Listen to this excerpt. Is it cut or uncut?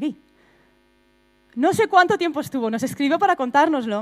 uncut